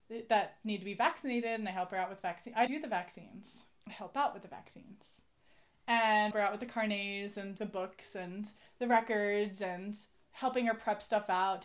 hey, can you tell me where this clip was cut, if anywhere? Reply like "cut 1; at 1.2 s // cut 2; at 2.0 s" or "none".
cut 1; at 2.7 s // cut 2; at 3.8 s // cut 3; at 6.3 s // cut 4; at 7.6 s